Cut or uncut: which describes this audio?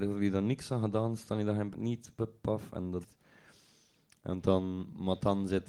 cut